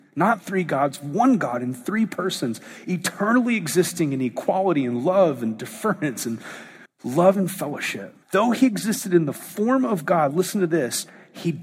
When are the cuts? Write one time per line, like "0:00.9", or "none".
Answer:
0:06.9
0:08.2

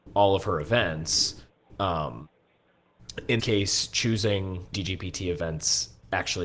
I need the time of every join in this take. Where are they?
0:03.4
0:04.7

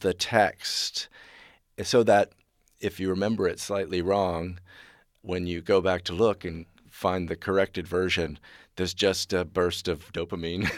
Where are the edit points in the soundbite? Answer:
none

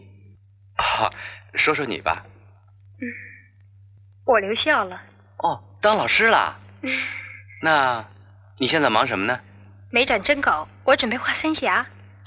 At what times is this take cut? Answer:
none

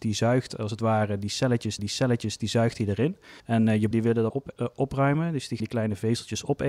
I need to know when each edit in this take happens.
0:01.8
0:03.4
0:03.9
0:04.3
0:05.6

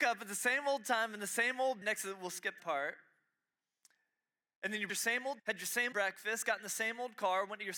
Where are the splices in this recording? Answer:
0:01.8
0:02.6
0:04.9
0:05.4
0:05.9

